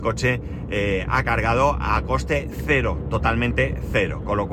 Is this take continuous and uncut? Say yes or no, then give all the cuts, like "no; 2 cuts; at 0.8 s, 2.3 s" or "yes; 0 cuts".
yes; 0 cuts